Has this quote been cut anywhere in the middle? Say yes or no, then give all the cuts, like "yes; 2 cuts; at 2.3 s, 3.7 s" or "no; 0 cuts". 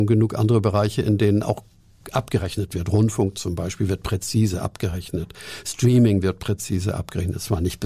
no; 0 cuts